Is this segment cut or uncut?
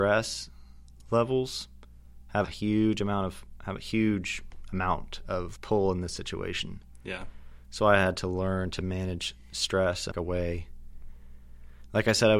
cut